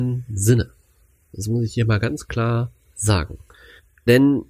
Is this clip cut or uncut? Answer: uncut